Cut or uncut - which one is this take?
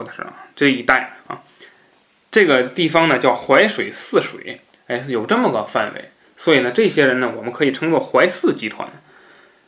cut